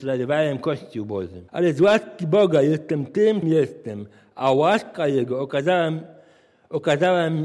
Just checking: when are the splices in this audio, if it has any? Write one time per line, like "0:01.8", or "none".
0:01.5
0:03.4